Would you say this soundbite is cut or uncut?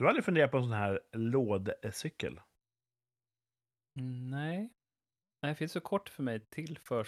uncut